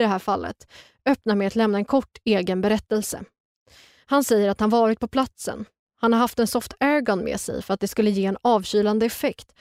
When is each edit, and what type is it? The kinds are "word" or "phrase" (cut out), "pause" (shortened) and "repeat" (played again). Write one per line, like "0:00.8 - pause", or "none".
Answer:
none